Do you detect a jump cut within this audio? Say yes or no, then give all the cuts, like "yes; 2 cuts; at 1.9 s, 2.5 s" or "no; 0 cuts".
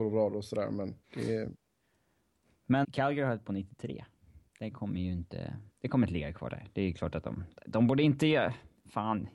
yes; 5 cuts; at 1.0 s, 2.8 s, 3.4 s, 4.5 s, 5.7 s